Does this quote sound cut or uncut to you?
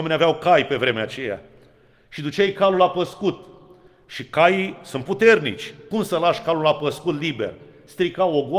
uncut